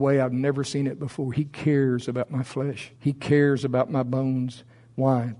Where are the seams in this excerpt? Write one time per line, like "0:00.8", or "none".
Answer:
0:03.0